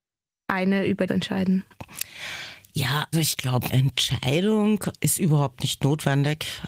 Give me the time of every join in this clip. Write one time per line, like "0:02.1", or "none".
0:01.1
0:03.1
0:03.7
0:05.0